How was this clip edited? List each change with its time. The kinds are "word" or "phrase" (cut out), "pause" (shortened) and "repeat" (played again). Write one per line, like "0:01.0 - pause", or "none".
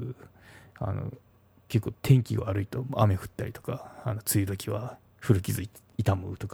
0:02.0 - pause